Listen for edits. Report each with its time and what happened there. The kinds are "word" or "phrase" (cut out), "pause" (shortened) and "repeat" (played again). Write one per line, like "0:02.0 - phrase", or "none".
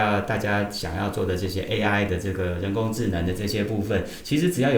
none